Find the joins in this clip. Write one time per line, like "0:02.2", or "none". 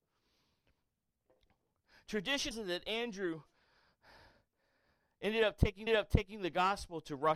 0:02.5
0:05.9